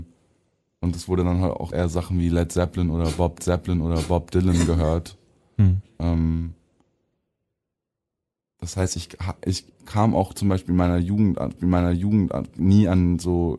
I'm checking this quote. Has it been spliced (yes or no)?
yes